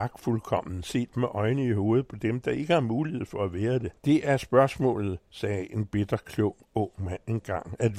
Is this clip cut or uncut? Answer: cut